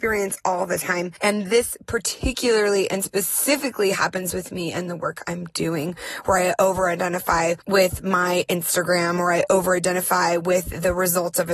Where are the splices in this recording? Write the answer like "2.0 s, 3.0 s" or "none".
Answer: none